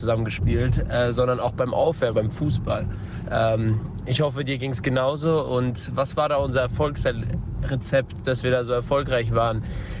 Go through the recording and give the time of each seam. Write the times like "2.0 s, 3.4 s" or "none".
2.1 s